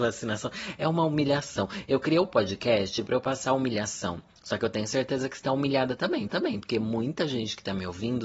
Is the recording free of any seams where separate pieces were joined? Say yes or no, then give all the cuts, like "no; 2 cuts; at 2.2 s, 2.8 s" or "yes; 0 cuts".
no; 1 cut; at 6.3 s